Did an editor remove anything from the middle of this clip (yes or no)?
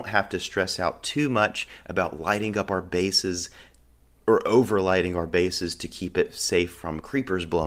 no